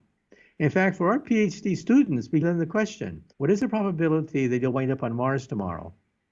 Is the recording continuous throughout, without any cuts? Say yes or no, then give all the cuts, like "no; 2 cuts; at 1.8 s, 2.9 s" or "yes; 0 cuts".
no; 2 cuts; at 2.4 s, 3.3 s